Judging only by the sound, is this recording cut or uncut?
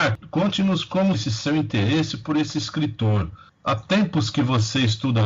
cut